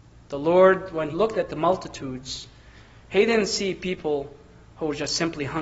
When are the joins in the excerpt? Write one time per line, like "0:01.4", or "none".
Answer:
0:01.1